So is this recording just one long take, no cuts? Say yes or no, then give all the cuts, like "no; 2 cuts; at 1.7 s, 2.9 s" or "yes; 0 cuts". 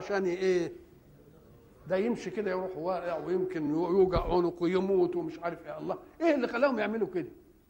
yes; 0 cuts